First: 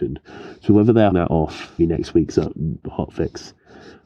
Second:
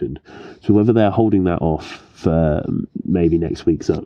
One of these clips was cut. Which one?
first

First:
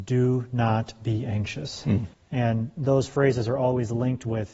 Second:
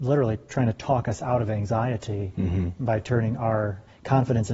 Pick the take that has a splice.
first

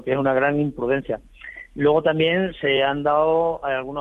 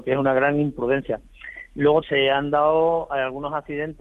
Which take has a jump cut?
second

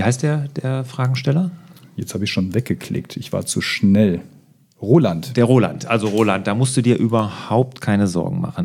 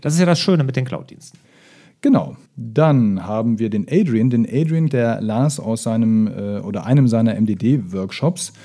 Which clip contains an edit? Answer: second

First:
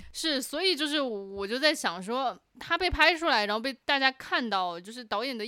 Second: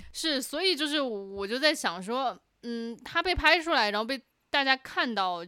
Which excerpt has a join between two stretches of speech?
first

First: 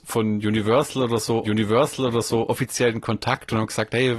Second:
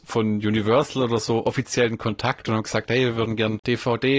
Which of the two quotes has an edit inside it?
first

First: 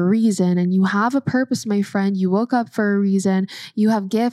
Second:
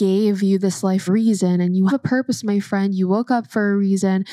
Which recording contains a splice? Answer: second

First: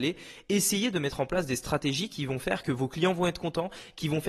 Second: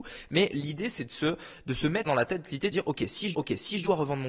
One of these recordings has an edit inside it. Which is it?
second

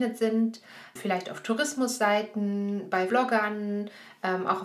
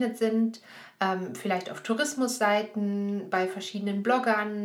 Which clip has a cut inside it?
first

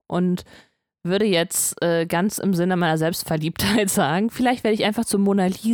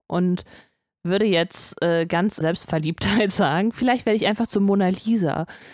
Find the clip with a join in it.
second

